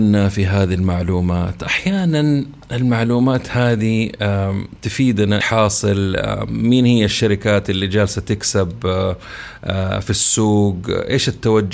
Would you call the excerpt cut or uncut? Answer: cut